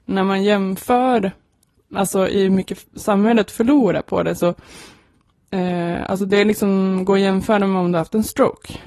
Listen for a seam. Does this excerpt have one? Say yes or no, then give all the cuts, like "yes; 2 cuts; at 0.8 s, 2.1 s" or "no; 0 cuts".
no; 0 cuts